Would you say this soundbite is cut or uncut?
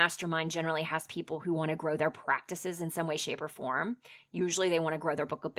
uncut